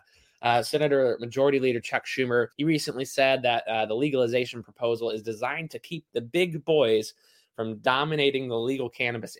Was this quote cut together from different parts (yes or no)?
yes